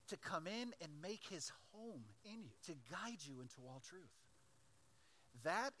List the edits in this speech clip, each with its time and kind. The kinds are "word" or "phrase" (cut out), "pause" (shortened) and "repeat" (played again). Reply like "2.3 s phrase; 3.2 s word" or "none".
2.6 s pause